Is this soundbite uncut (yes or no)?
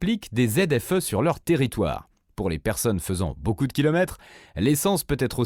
yes